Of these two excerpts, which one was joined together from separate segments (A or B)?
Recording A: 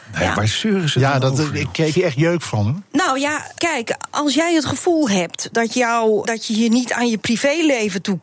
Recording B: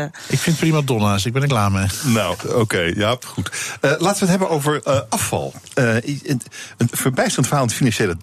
A